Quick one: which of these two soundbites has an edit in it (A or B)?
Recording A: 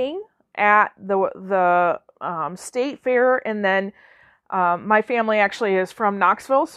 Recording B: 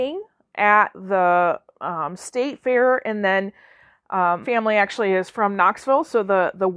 B